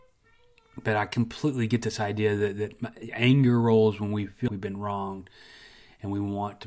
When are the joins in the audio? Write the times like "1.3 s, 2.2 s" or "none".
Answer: 4.5 s